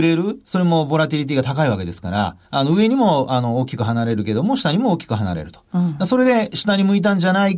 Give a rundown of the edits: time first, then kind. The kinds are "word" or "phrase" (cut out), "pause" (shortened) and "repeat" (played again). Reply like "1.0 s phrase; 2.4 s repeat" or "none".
2.4 s pause